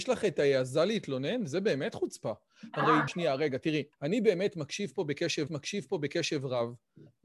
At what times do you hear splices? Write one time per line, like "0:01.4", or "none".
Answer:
0:03.1
0:03.9
0:05.5